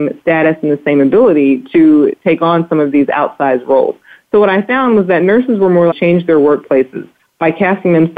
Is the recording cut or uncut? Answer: cut